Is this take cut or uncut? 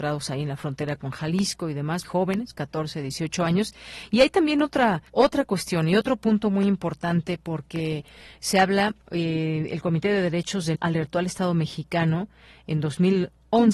cut